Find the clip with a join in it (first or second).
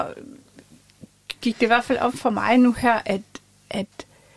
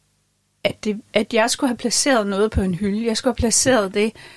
second